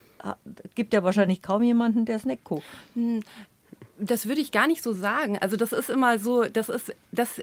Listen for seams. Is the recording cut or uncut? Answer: uncut